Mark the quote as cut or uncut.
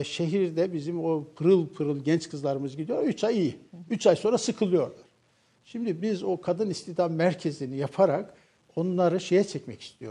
uncut